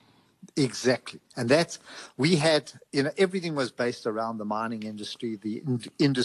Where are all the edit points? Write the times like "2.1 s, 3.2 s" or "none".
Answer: 1.2 s